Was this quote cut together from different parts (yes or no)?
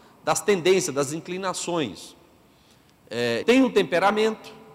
yes